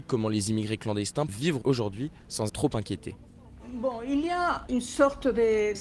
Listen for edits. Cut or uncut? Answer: cut